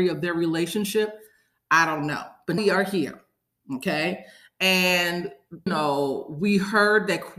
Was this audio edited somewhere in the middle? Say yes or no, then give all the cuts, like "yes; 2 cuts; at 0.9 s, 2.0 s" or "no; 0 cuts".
yes; 2 cuts; at 2.6 s, 5.7 s